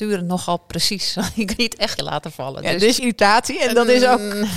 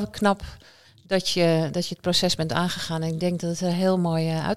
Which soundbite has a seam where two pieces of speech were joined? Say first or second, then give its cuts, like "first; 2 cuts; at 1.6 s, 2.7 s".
first; 3 cuts; at 1.6 s, 2.0 s, 3.0 s